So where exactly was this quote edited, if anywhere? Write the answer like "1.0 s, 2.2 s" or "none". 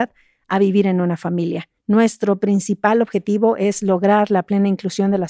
1.8 s